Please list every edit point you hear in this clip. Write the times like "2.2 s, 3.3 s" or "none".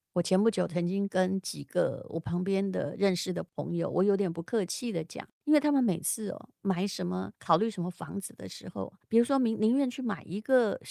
5.3 s, 7.3 s, 9.0 s